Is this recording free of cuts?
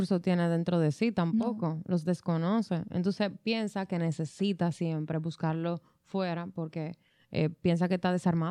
yes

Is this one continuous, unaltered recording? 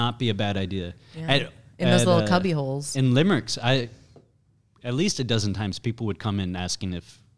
yes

